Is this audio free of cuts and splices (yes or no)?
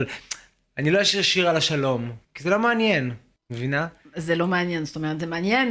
no